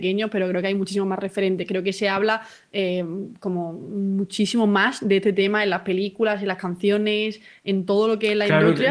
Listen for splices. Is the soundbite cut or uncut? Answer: uncut